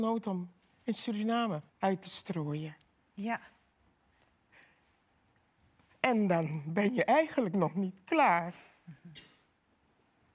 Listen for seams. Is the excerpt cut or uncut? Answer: cut